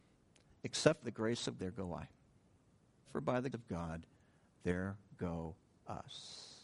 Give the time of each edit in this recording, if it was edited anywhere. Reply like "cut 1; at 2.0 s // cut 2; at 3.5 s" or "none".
cut 1; at 1.0 s // cut 2; at 1.6 s // cut 3; at 3.0 s // cut 4; at 3.5 s